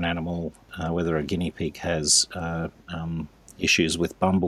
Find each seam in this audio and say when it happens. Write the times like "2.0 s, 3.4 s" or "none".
none